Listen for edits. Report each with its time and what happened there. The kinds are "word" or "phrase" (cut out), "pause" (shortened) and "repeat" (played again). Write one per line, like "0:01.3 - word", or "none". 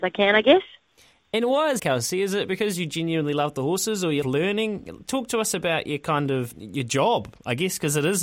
0:01.8 - word
0:04.2 - word
0:06.5 - word